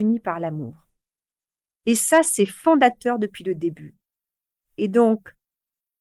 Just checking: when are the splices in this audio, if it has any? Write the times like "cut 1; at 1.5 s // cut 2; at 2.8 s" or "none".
none